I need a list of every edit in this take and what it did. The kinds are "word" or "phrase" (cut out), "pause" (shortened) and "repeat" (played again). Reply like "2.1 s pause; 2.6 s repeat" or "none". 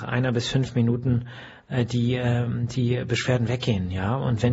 none